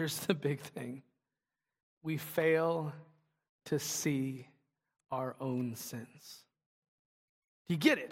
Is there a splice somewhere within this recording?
no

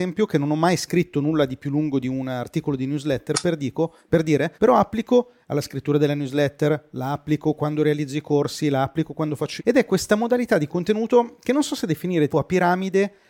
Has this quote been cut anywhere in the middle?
yes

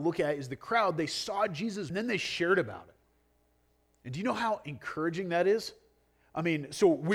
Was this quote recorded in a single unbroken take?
no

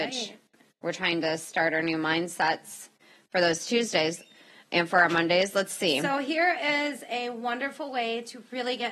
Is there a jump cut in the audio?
no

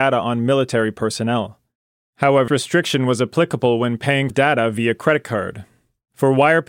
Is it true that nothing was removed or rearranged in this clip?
no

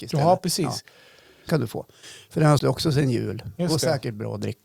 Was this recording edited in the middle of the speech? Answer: yes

